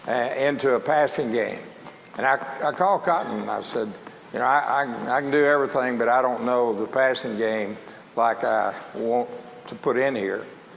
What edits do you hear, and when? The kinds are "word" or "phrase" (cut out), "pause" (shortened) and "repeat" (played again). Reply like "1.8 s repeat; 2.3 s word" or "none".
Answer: none